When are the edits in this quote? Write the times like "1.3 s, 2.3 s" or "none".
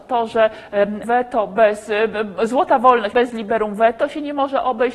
1.0 s, 3.1 s